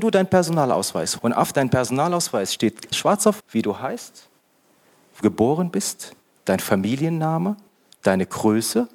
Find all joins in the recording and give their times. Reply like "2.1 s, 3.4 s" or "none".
1.2 s, 2.9 s, 3.4 s, 5.2 s